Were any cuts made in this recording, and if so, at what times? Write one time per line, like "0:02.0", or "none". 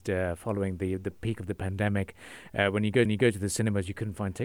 0:03.1

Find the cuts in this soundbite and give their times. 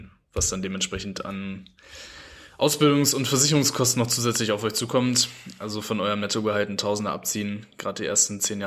none

